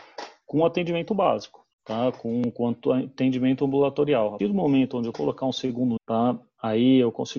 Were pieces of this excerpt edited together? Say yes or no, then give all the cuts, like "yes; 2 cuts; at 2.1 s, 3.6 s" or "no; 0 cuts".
yes; 4 cuts; at 1.7 s, 4.4 s, 5.1 s, 6.0 s